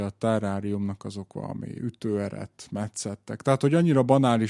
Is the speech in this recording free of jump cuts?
yes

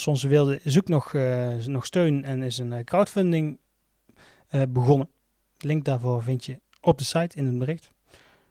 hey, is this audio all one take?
yes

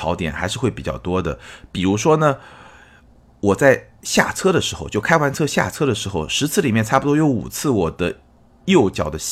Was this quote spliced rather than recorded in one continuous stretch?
no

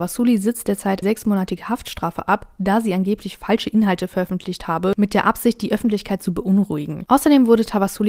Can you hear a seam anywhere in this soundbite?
yes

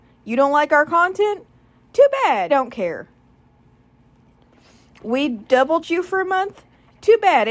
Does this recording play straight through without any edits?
no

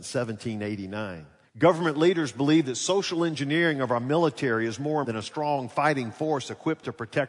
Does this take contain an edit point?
yes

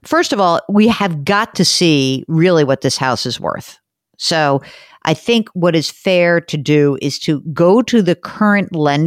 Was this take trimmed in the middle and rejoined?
no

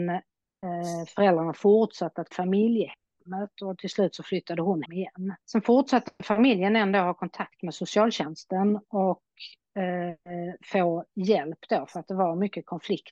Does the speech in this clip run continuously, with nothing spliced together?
no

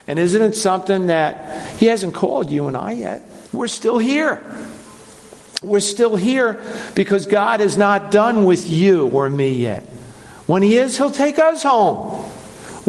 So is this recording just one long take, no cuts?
no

